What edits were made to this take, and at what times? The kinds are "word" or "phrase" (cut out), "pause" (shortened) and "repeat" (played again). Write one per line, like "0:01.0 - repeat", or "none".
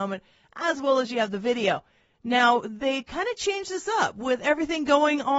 none